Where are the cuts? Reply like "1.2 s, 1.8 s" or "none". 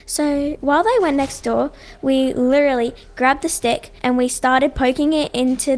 4.0 s